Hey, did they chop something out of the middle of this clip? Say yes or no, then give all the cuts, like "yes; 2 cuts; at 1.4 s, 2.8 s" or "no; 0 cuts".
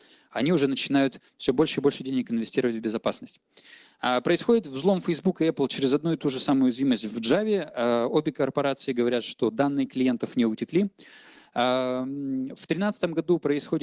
no; 0 cuts